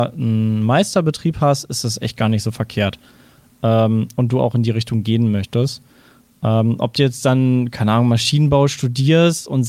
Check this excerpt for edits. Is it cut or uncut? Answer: uncut